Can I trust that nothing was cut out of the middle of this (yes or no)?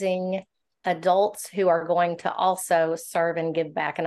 yes